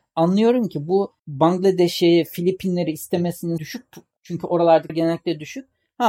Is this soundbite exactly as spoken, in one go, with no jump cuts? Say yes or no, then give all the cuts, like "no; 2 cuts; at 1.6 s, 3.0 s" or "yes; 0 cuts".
no; 3 cuts; at 1.2 s, 3.6 s, 4.9 s